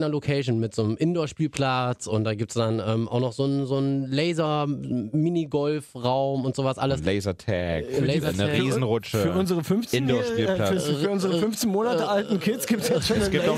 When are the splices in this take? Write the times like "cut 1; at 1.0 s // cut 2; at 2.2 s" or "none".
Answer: none